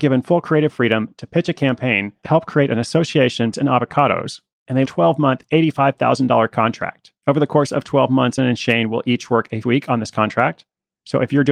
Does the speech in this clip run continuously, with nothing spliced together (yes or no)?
no